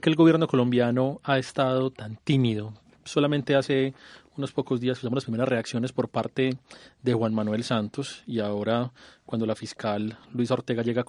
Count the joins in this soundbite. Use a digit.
1